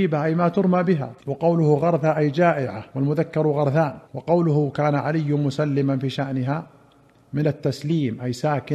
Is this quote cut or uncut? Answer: cut